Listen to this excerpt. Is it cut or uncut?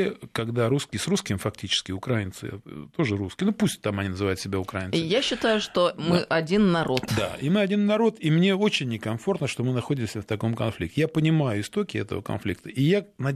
uncut